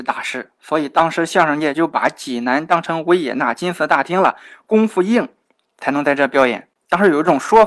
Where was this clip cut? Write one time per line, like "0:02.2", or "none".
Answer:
0:06.8

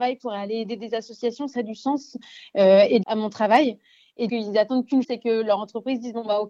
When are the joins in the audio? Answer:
0:01.5
0:03.0
0:04.3
0:05.0

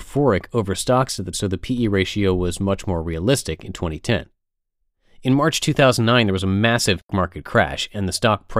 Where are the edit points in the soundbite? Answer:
0:01.3
0:07.1

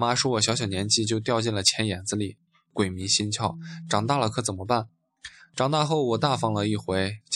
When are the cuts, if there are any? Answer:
none

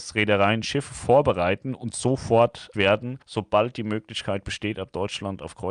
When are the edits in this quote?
0:02.7
0:03.2

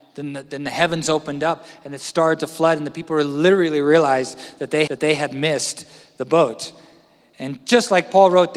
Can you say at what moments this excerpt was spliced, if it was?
0:04.9

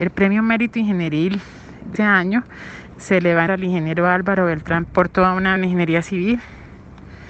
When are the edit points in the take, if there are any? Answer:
0:01.9
0:03.5
0:04.9
0:05.6

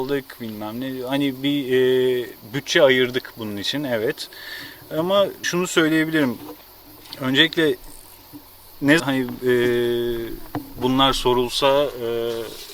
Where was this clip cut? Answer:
0:05.4
0:09.0
0:10.8

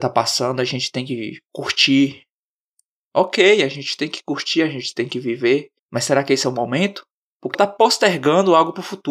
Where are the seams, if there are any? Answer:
0:07.5

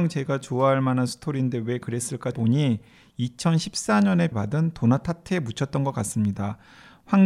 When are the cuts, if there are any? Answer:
0:02.3
0:04.3

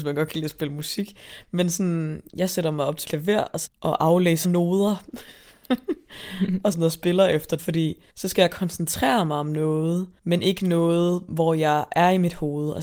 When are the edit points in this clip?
0:03.0
0:03.7
0:04.4
0:06.7
0:07.6
0:08.1
0:10.2

